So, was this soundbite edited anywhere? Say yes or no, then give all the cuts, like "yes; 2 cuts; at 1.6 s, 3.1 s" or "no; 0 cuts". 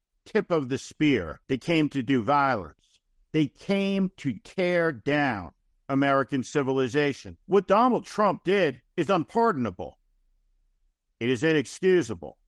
yes; 5 cuts; at 1.4 s, 3.2 s, 5.7 s, 7.4 s, 8.9 s